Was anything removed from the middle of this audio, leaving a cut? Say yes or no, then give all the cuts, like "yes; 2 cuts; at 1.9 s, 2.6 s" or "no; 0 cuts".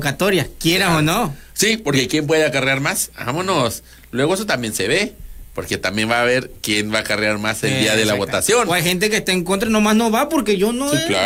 no; 0 cuts